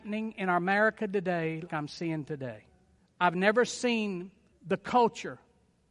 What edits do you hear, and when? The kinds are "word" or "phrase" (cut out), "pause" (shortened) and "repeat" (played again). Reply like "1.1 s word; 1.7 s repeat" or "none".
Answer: 1.7 s word; 3.0 s pause; 4.5 s pause